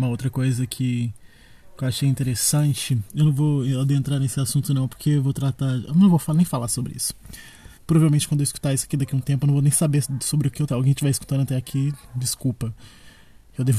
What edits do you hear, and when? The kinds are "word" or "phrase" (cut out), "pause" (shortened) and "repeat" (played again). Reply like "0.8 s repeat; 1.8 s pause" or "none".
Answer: 7.8 s pause; 10.7 s phrase

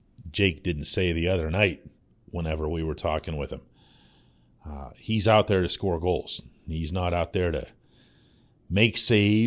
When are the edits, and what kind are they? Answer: 2.0 s pause

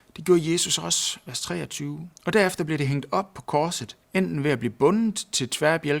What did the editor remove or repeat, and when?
2.2 s pause; 4.0 s pause

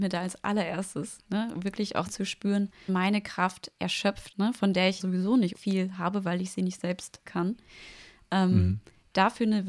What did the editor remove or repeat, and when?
2.1 s word; 2.9 s word; 4.3 s word; 5.0 s word; 5.5 s word; 7.3 s word

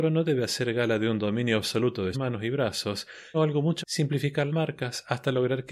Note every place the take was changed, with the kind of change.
2.1 s word; 3.3 s word; 3.8 s word; 4.5 s word

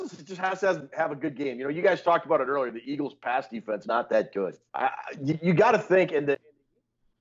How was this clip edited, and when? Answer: 3.8 s phrase; 4.7 s pause

